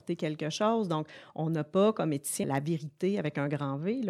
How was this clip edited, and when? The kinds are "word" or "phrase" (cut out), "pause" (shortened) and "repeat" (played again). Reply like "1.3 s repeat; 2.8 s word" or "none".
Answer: 2.4 s word

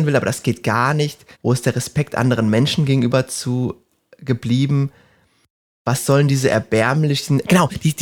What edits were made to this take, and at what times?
1.3 s pause

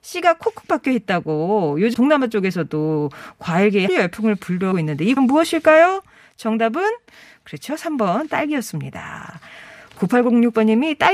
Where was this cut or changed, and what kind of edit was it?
1.9 s word; 3.9 s word; 4.7 s word; 5.2 s word

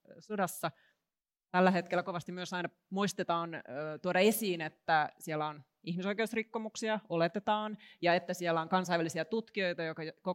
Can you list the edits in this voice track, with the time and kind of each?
none

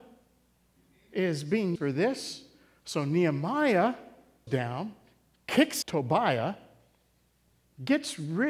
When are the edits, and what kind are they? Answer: 1.8 s word; 4.5 s word; 5.8 s word

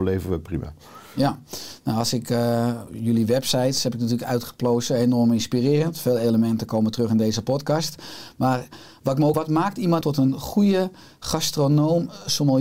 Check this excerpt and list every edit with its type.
9.3 s word; 10.0 s word

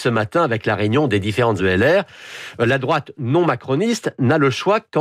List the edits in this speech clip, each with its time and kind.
1.6 s word

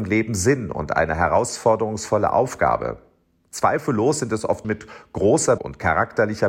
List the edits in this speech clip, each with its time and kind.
4.6 s word; 5.6 s word

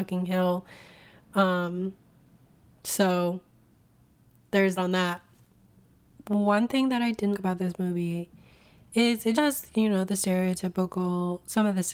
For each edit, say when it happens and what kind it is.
4.8 s word; 7.3 s word; 9.3 s word

